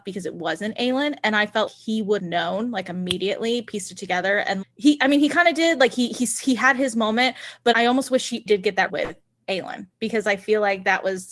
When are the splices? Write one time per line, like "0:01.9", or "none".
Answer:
0:01.7
0:02.2
0:04.6
0:07.7
0:08.5
0:08.9